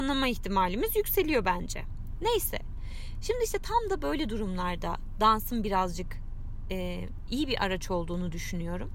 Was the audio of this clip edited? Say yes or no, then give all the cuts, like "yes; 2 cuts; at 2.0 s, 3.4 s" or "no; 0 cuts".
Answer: no; 0 cuts